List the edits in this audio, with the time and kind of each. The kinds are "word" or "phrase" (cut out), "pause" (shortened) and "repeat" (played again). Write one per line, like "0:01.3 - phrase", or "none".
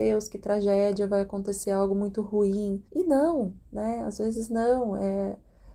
0:02.9 - pause
0:03.6 - pause